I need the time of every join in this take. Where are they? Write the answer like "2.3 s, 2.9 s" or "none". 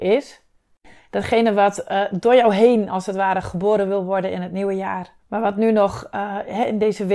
5.2 s